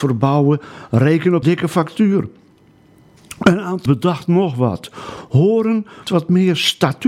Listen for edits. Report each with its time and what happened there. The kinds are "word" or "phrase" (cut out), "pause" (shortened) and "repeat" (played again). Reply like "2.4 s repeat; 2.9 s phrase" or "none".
1.4 s word; 3.9 s word; 6.0 s word